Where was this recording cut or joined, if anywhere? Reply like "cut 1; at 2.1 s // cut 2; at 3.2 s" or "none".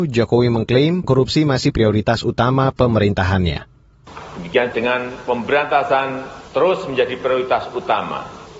cut 1; at 1.0 s // cut 2; at 1.7 s // cut 3; at 4.7 s // cut 4; at 6.5 s